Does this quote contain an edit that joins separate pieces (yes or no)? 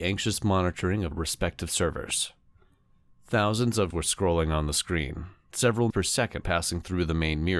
yes